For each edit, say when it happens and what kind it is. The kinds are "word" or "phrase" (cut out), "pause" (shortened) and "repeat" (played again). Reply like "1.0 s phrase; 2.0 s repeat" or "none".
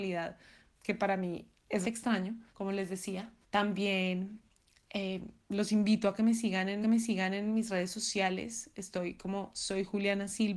1.8 s word; 2.5 s pause; 3.4 s pause; 6.8 s repeat